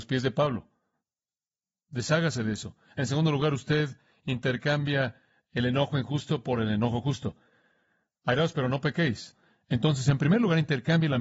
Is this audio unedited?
yes; 0 cuts

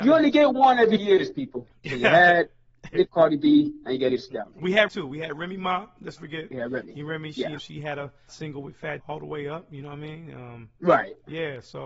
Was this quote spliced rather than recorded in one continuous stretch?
yes; 8 cuts; at 1.0 s, 3.1 s, 4.1 s, 4.9 s, 6.2 s, 7.6 s, 8.3 s, 9.0 s

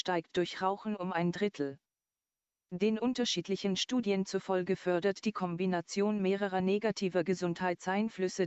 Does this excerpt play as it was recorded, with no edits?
yes; 0 cuts

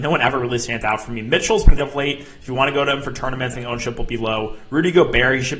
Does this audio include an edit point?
yes; 2 cuts; at 1.8 s, 3.5 s

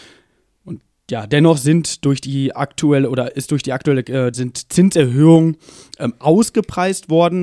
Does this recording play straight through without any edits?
no; 1 cut; at 4.3 s

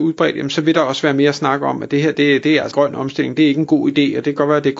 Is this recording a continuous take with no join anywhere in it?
no; 1 cut; at 2.7 s

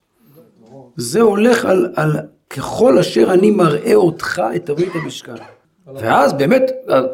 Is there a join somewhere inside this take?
yes; 1 cut; at 5.6 s

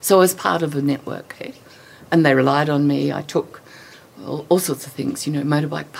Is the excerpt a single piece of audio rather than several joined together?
yes; 0 cuts

